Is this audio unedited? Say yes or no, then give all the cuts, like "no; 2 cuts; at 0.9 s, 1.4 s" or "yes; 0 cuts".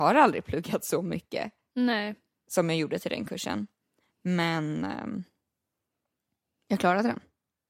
yes; 0 cuts